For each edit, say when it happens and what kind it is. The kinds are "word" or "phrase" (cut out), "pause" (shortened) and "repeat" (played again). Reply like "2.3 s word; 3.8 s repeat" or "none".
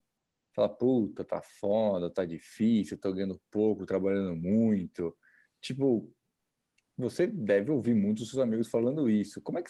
none